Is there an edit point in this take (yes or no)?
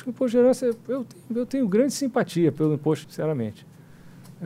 yes